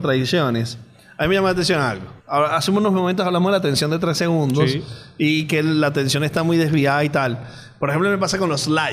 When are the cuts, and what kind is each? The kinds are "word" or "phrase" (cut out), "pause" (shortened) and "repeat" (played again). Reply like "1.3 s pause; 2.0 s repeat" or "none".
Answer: 2.2 s pause